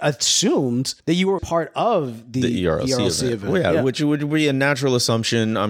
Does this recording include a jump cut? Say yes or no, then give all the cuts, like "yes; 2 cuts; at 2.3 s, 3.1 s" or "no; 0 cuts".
yes; 2 cuts; at 1.0 s, 1.4 s